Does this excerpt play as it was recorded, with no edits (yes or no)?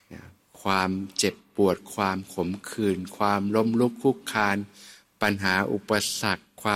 yes